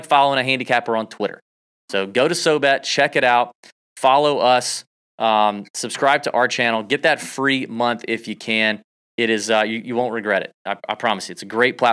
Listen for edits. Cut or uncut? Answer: uncut